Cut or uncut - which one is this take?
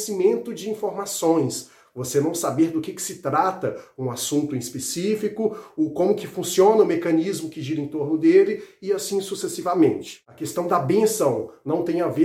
uncut